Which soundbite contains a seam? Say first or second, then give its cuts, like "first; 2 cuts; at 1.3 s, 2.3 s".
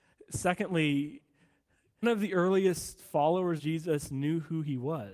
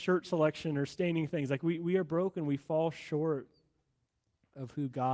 first; 2 cuts; at 2.0 s, 3.6 s